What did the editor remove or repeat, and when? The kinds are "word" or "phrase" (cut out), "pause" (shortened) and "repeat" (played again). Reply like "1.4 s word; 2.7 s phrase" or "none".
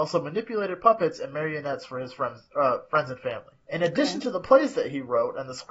3.6 s pause